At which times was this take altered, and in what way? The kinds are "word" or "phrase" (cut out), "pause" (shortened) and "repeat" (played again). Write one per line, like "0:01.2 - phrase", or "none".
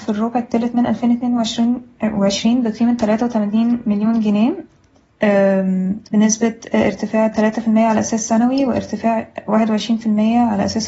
0:06.1 - pause